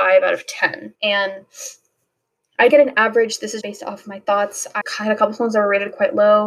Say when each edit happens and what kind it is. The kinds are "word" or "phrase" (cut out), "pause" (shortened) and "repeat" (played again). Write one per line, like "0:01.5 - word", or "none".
0:00.9 - pause
0:02.7 - word
0:03.6 - word
0:04.8 - phrase